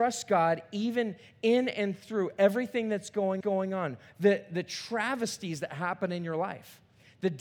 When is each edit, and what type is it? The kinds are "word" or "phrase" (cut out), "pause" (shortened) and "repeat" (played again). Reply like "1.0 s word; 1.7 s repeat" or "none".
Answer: 3.4 s repeat

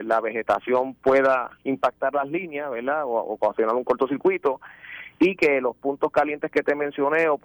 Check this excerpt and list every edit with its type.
1.5 s pause

